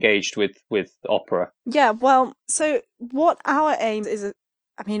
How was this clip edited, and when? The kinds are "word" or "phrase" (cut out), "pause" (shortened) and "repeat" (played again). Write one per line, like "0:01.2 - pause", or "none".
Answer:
0:01.6 - pause
0:02.4 - pause
0:04.0 - word